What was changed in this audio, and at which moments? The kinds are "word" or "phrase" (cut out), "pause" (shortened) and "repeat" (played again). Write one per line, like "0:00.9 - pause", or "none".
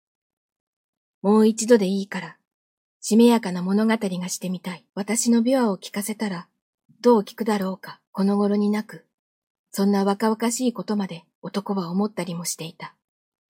0:02.8 - phrase
0:04.9 - pause
0:08.1 - pause
0:11.3 - pause